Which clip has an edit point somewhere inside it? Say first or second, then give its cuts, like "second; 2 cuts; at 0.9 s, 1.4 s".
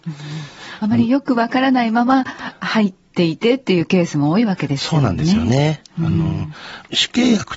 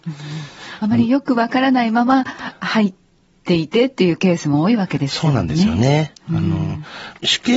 first; 1 cut; at 3.0 s